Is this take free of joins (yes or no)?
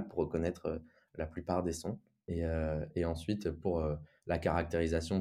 yes